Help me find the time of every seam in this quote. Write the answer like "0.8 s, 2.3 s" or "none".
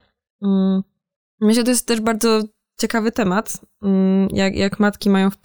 none